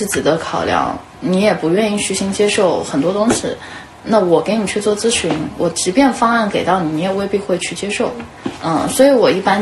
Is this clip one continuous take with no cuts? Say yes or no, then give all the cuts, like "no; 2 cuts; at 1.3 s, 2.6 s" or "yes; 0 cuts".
no; 1 cut; at 8.6 s